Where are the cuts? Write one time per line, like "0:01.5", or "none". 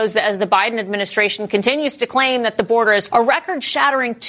0:03.1